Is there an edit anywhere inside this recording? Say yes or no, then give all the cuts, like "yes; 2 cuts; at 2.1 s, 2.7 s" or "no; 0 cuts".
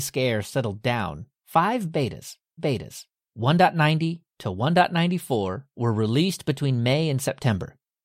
yes; 1 cut; at 2.6 s